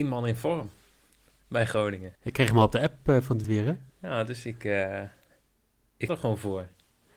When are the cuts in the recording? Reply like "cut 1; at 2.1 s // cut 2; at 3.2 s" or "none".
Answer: cut 1; at 2.2 s // cut 2; at 3.4 s // cut 3; at 3.9 s // cut 4; at 6.1 s